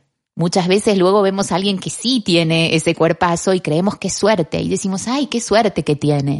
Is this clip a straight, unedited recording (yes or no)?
yes